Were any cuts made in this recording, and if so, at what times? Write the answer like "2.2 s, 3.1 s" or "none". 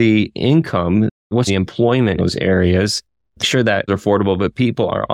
1.5 s, 2.2 s, 3.4 s, 3.9 s